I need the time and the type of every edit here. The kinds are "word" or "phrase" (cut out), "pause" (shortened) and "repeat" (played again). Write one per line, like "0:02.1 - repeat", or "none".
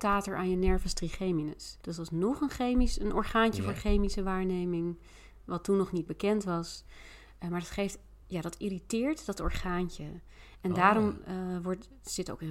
0:01.8 - pause
0:08.2 - pause